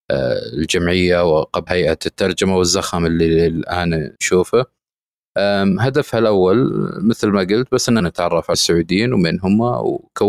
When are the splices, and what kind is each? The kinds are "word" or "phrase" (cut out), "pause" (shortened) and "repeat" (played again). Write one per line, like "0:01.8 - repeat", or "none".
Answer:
0:01.7 - word
0:04.2 - pause
0:08.0 - word
0:08.5 - word